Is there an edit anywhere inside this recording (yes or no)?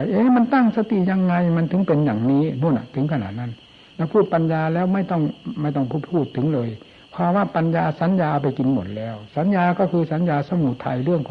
no